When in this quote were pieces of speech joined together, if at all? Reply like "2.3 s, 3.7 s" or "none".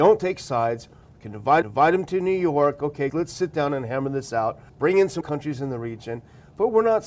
1.6 s, 3.1 s, 4.7 s, 5.2 s